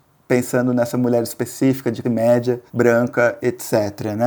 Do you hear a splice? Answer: yes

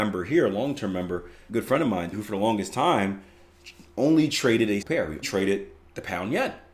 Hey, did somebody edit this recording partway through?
yes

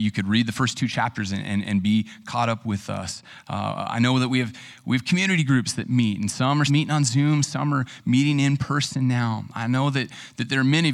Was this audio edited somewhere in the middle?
yes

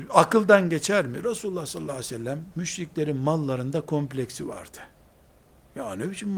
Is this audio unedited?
yes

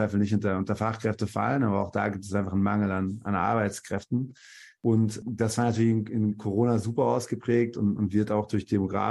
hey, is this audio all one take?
yes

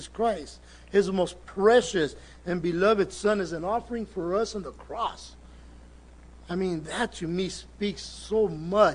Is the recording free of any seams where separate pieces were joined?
yes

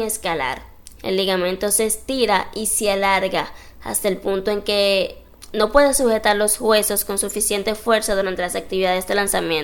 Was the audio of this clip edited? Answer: no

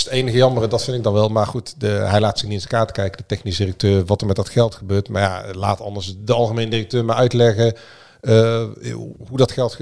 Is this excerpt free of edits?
yes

